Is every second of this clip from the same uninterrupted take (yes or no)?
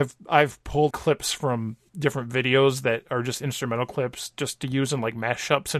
no